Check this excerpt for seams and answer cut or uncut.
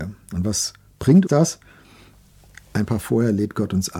cut